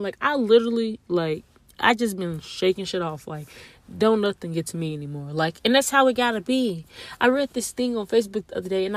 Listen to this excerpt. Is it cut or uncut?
uncut